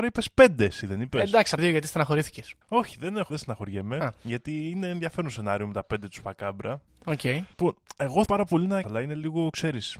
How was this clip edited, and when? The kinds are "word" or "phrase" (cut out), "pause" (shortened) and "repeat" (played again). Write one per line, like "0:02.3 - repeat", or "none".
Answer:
0:01.6 - phrase
0:02.6 - pause
0:03.3 - word
0:07.5 - pause
0:08.3 - word
0:08.8 - phrase